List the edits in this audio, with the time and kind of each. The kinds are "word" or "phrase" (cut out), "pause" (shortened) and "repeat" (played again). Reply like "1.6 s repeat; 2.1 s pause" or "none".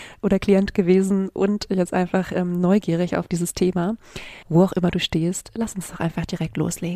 4.4 s pause

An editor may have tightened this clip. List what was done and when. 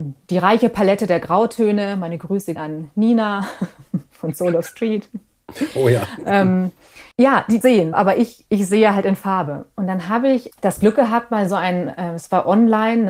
2.6 s word; 7.1 s pause; 7.6 s phrase; 7.9 s word; 10.5 s word

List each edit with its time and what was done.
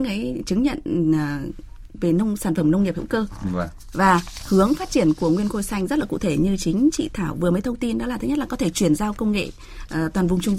none

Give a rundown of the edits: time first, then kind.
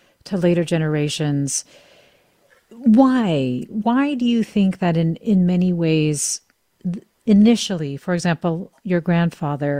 none

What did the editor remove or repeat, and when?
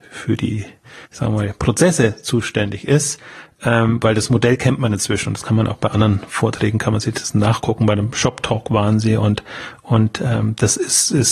1.1 s pause

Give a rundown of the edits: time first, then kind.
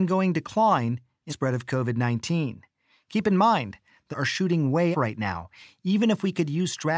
1.3 s word; 4.1 s word; 4.9 s word

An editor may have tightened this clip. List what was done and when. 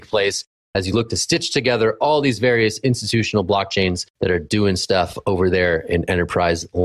4.1 s pause

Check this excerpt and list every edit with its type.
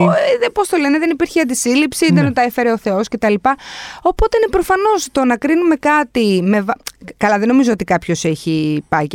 none

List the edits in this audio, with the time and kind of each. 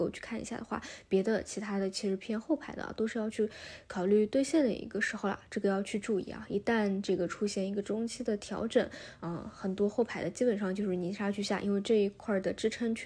none

